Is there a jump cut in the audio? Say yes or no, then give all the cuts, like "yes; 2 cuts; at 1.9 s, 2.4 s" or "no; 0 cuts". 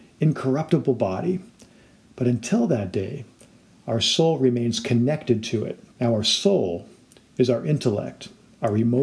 yes; 1 cut; at 5.9 s